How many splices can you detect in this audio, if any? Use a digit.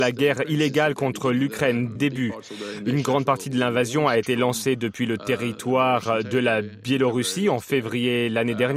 1